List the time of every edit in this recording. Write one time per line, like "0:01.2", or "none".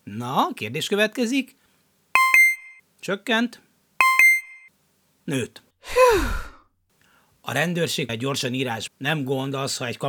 0:02.8
0:05.7
0:08.1
0:08.9

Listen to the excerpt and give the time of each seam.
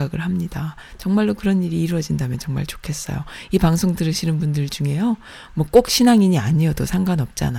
none

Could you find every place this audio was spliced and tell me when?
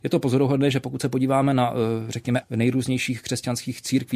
0:02.4

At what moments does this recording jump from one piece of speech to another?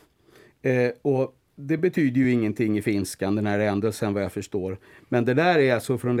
none

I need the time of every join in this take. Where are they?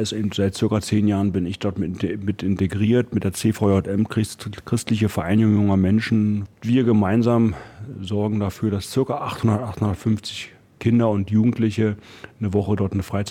none

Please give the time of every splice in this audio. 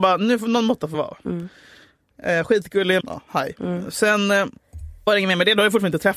0:00.9
0:03.0
0:05.1

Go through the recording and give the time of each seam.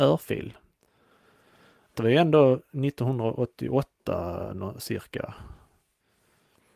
0:01.9

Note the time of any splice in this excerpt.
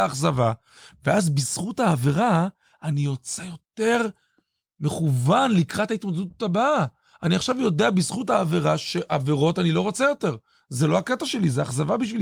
none

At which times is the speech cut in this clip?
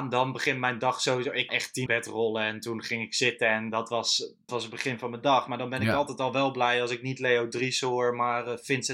0:01.5
0:01.9
0:04.5

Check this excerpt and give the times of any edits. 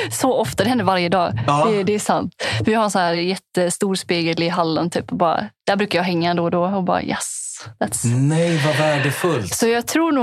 none

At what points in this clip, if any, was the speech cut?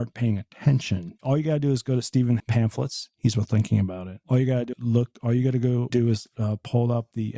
0:01.2
0:02.4
0:04.7
0:05.9

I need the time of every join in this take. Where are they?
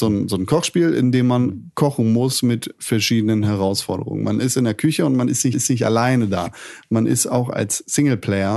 0:05.5

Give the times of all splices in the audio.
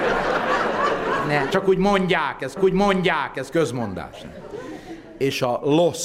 0:01.5
0:02.6

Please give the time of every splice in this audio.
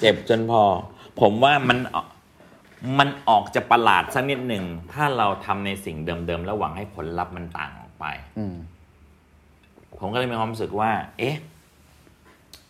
none

